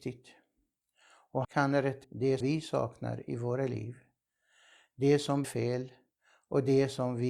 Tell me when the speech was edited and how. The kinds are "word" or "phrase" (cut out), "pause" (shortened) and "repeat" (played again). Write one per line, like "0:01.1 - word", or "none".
0:01.4 - word
0:02.0 - word
0:02.4 - word
0:05.4 - word